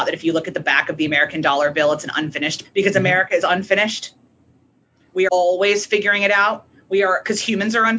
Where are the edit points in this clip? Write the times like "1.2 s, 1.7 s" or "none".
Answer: 2.6 s, 3.4 s, 5.3 s